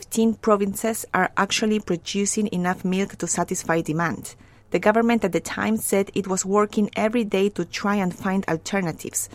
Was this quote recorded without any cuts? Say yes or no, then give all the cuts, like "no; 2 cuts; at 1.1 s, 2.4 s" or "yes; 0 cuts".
yes; 0 cuts